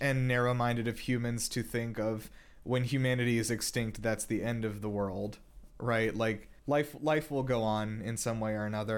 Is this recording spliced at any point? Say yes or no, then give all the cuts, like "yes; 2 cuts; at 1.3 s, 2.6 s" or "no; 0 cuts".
yes; 1 cut; at 6.6 s